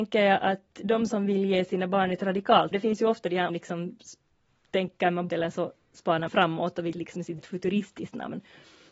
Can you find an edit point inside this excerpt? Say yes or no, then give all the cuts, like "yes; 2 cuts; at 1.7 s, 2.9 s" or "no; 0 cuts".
yes; 6 cuts; at 2.7 s, 3.5 s, 5.3 s, 6.3 s, 6.9 s, 7.4 s